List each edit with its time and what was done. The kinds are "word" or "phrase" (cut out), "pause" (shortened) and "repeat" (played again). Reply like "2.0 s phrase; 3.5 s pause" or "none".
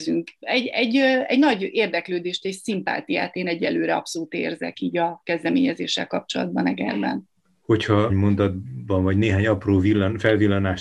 8.1 s word